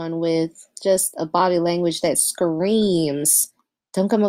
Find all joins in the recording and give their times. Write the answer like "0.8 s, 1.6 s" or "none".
none